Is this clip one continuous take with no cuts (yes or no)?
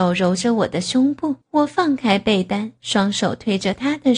no